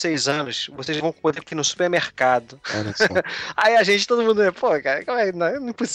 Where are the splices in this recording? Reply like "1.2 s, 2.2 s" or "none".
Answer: 1.4 s